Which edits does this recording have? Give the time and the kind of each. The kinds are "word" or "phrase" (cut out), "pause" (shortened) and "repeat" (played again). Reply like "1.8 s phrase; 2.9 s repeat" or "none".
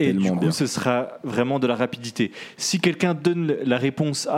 none